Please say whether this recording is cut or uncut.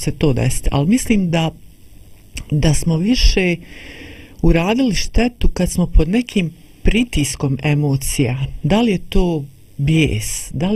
uncut